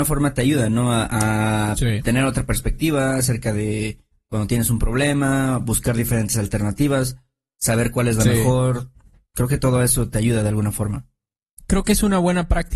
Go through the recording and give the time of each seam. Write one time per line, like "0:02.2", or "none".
none